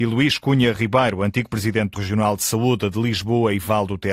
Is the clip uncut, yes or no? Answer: no